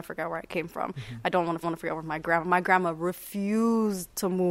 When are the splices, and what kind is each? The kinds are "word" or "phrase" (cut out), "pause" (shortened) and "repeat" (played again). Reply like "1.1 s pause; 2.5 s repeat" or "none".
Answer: 1.6 s repeat

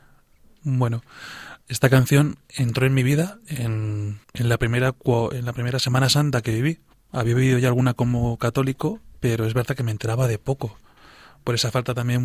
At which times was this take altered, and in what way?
1.6 s pause; 2.4 s pause; 4.2 s pause; 6.9 s pause

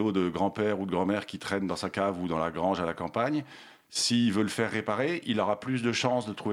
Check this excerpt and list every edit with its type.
none

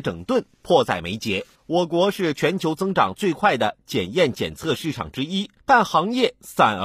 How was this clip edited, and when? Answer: 5.6 s pause

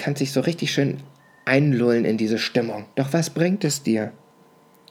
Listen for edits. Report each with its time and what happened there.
2.9 s pause

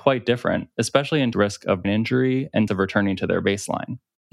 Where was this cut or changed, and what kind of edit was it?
1.3 s phrase; 1.8 s word; 2.7 s word

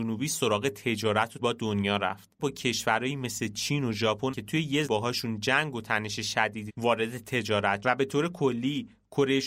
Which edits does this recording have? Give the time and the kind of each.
1.4 s word; 2.4 s word; 4.3 s word; 4.8 s word; 6.7 s word; 7.8 s word

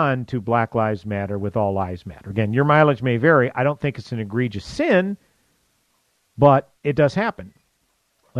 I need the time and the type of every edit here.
6.8 s pause

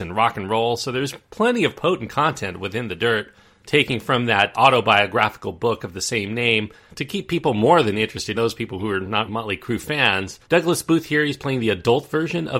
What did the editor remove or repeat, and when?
4.5 s word; 8.3 s word; 9.3 s word; 10.4 s pause

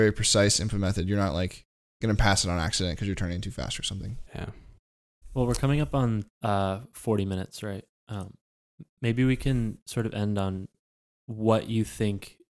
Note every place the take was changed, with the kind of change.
4.3 s pause; 6.3 s pause

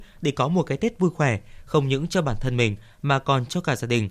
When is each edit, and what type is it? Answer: none

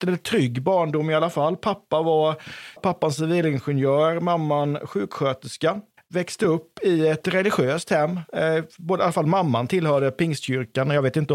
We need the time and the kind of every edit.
2.8 s phrase; 6.0 s pause

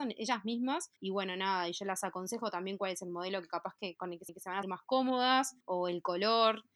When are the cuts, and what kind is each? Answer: 1.0 s pause; 4.3 s repeat; 4.6 s word; 5.6 s pause

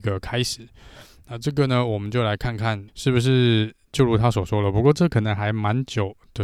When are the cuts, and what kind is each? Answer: 2.9 s word

